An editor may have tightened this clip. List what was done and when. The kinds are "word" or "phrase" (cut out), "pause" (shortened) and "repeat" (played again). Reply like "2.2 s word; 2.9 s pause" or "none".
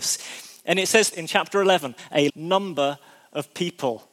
1.1 s word; 2.3 s word